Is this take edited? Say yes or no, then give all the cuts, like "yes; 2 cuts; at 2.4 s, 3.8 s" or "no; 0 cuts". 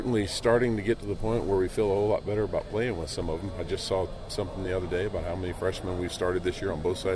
no; 0 cuts